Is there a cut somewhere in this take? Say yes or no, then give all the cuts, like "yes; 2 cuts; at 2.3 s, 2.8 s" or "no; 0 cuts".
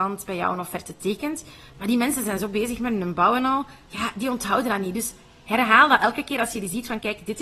no; 0 cuts